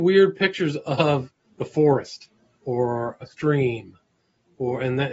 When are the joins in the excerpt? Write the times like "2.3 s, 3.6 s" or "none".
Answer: none